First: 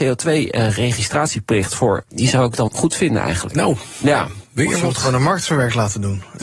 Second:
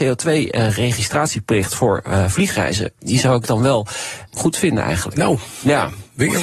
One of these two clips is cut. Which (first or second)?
first